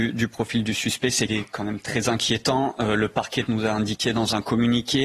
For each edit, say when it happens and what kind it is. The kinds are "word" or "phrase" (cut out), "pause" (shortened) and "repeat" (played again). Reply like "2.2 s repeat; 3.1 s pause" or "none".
1.3 s word; 3.5 s word